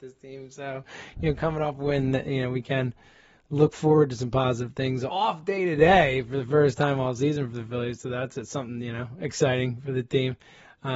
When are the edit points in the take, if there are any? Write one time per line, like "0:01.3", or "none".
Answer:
none